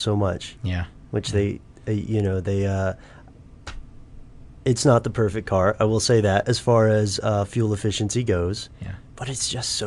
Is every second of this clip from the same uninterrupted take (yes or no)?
yes